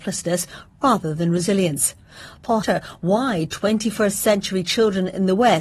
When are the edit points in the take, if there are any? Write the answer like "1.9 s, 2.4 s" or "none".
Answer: 2.6 s